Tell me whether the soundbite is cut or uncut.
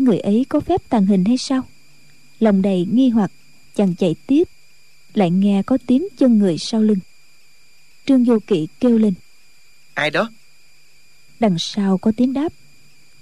uncut